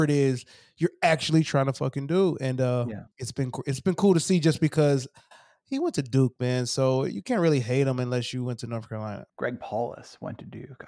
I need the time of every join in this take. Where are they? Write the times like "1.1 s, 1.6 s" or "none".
3.1 s, 9.3 s